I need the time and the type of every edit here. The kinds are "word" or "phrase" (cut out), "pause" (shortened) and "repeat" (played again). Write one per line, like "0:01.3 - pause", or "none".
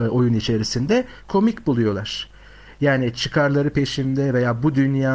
none